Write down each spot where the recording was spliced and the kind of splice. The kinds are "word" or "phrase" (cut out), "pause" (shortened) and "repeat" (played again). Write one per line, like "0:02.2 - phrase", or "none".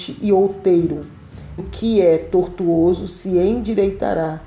0:01.6 - word